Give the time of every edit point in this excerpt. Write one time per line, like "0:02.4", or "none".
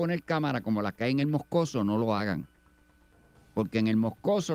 none

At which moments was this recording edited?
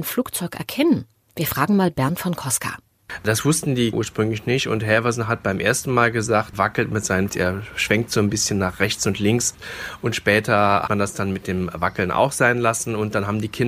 0:03.9
0:06.5
0:07.3
0:10.9

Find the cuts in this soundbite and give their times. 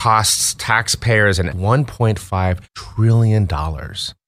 0:01.5
0:02.7

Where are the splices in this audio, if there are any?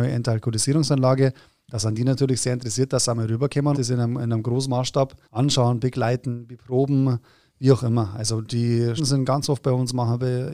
0:03.7
0:05.2
0:09.0

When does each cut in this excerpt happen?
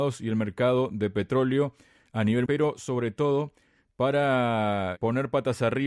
0:02.5

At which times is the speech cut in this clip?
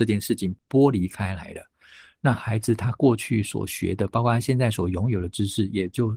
none

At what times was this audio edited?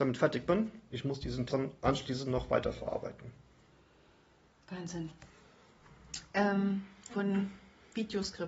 0:00.9
0:01.5
0:07.1

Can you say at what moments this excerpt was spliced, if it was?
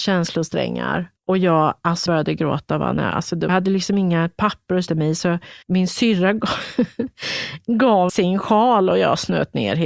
0:01.2
0:02.1
0:03.5
0:04.9
0:05.6
0:08.1

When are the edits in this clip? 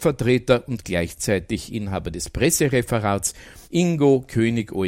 0:03.6

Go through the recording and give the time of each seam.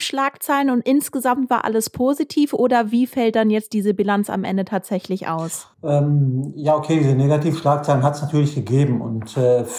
0:05.7

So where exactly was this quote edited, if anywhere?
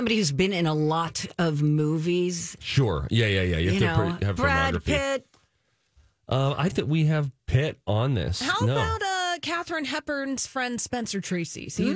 0:04.4
0:06.7
0:07.4

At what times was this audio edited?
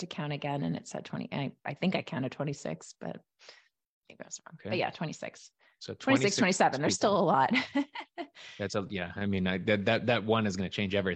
none

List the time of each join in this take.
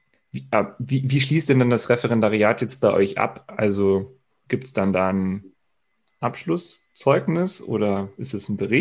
none

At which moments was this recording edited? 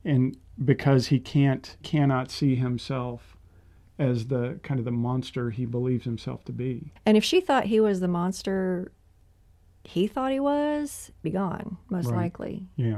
0:01.8
0:07.0
0:11.2

